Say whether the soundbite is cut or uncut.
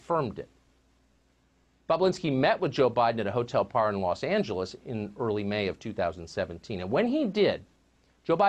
uncut